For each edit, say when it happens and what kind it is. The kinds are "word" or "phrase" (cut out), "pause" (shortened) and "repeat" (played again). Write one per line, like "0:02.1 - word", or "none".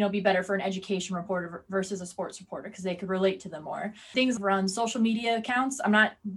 0:04.4 - phrase